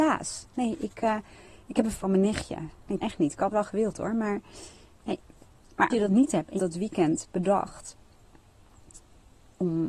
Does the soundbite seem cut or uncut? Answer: cut